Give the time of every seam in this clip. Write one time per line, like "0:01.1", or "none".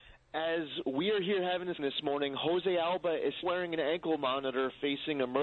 0:01.8
0:03.4